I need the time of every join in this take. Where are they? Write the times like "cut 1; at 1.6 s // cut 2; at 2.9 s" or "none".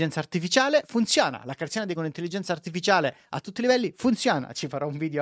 cut 1; at 1.9 s

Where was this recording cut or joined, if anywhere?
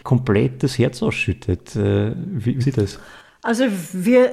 cut 1; at 2.6 s

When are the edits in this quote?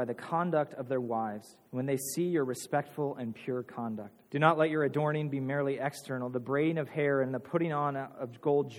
cut 1; at 1.7 s // cut 2; at 4.3 s

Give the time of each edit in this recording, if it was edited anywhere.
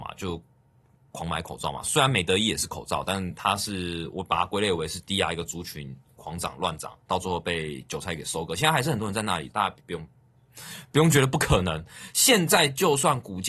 cut 1; at 9.5 s // cut 2; at 9.8 s

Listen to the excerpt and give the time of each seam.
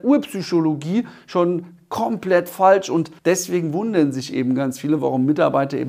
cut 1; at 3.2 s

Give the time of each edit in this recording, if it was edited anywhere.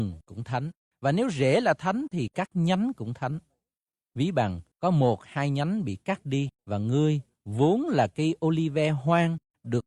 cut 1; at 3.8 s // cut 2; at 4.7 s // cut 3; at 6.6 s

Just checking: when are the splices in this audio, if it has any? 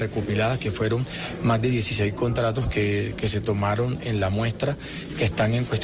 none

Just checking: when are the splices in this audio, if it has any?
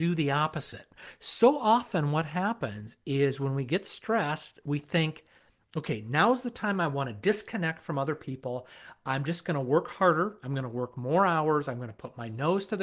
none

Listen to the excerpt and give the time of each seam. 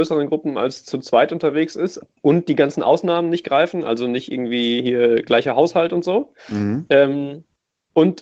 cut 1; at 6.4 s

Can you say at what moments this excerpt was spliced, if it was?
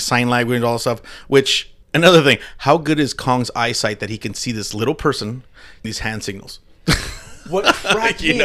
cut 1; at 1.8 s // cut 2; at 5.8 s

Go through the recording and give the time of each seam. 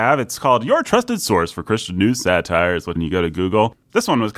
cut 1; at 3.0 s

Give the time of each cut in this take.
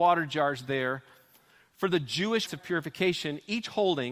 cut 1; at 2.5 s

